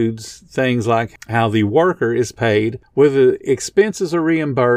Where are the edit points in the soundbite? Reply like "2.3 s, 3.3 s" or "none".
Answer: none